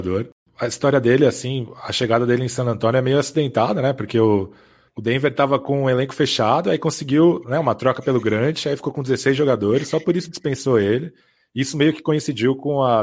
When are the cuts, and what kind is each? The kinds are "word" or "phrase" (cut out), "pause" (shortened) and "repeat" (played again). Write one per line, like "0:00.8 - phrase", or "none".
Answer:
none